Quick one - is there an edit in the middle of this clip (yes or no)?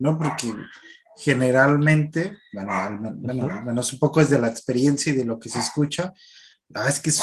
no